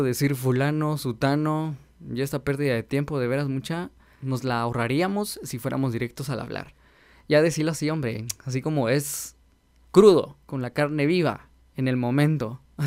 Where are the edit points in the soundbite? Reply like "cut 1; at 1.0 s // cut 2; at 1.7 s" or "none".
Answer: cut 1; at 10.4 s